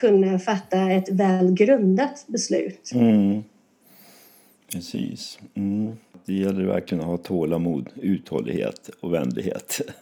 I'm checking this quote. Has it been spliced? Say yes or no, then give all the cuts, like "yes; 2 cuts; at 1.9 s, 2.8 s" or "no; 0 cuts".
no; 0 cuts